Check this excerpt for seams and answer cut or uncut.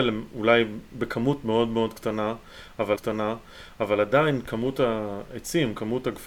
cut